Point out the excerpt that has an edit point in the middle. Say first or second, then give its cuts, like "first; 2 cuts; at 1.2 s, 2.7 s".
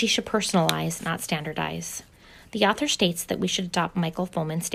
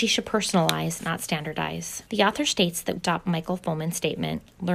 second; 2 cuts; at 2.1 s, 3.0 s